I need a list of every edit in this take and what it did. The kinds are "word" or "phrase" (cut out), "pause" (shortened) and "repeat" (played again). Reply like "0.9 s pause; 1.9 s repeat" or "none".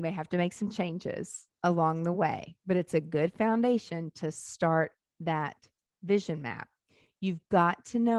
none